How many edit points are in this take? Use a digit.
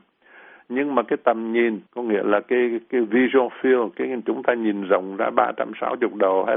1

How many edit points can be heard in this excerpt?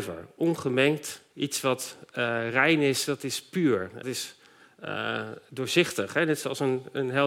2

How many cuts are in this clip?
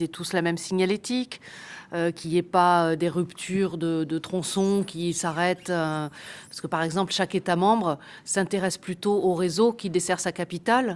0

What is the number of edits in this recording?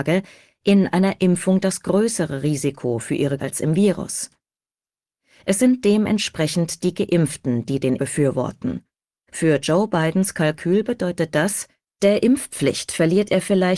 3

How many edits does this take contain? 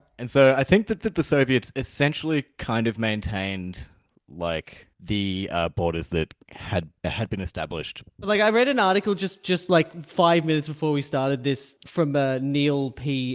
4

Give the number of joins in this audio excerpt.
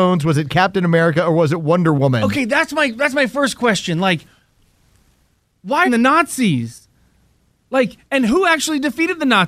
1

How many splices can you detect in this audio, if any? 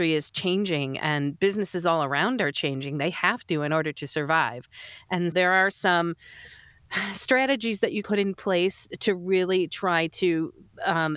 2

